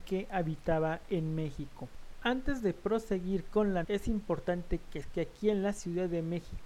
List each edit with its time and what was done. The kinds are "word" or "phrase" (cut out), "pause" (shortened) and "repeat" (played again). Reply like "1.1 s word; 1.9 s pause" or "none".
3.8 s word; 5.0 s word